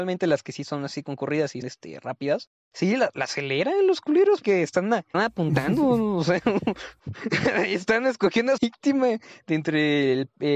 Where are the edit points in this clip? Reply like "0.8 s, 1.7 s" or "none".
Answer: 1.6 s, 4.4 s, 5.1 s, 8.6 s